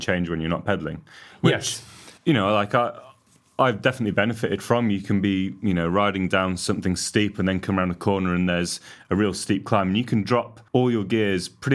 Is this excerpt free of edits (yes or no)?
no